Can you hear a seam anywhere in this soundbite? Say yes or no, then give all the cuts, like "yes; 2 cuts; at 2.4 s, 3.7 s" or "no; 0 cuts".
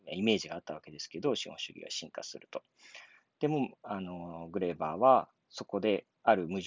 no; 0 cuts